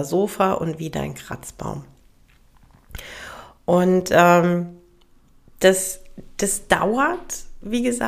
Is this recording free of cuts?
yes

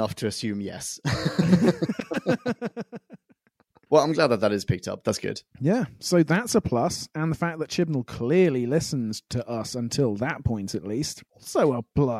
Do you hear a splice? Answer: no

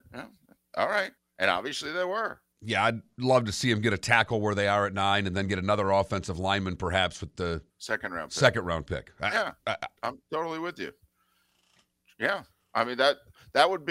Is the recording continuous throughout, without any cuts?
no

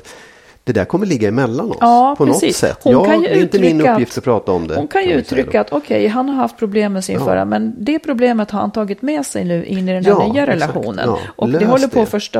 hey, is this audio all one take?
yes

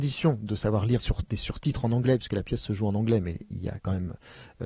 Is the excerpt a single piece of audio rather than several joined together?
no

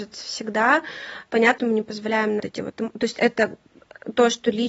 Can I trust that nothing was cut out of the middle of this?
no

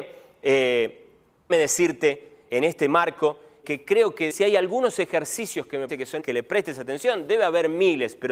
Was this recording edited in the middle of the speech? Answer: yes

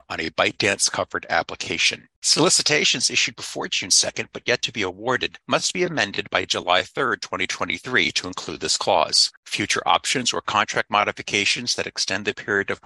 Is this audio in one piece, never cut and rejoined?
no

